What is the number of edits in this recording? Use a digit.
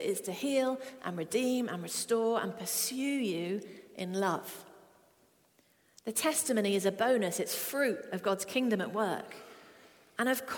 0